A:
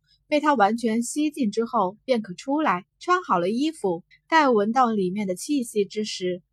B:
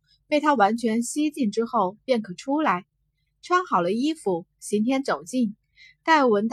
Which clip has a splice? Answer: A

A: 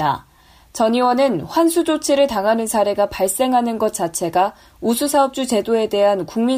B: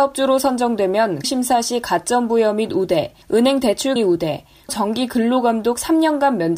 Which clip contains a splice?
B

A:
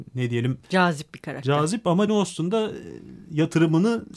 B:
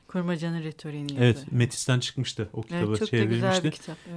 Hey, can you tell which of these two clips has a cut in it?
A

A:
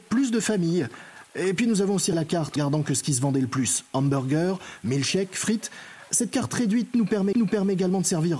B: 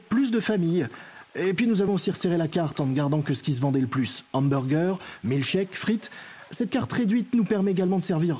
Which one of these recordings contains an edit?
A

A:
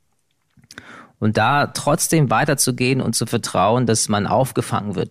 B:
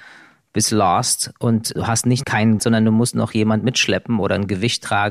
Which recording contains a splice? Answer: B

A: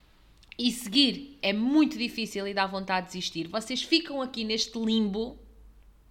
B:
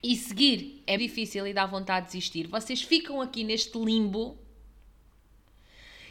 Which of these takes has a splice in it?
B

